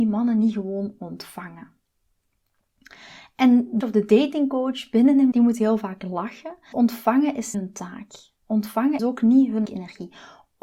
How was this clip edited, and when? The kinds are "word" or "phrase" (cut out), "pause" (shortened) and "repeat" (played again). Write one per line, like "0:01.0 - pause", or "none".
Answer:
0:03.8 - word
0:05.3 - word
0:06.7 - word
0:07.5 - word
0:09.0 - word
0:09.6 - word